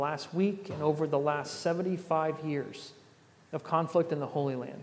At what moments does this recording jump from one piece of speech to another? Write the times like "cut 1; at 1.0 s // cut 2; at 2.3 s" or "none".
none